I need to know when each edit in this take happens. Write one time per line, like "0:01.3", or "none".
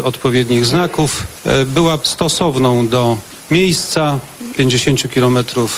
0:02.0
0:04.5